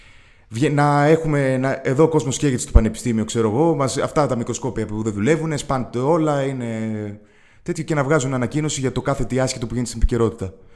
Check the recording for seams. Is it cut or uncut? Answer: uncut